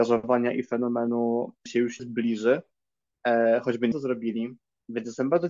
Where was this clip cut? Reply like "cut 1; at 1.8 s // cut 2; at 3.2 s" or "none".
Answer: cut 1; at 1.7 s // cut 2; at 2.0 s // cut 3; at 3.9 s